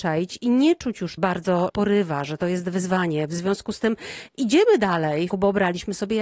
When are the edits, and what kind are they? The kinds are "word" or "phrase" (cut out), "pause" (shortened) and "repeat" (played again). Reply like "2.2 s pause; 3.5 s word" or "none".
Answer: 1.2 s word; 1.7 s phrase; 5.3 s phrase